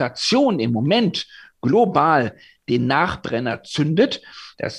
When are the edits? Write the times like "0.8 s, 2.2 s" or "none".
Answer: none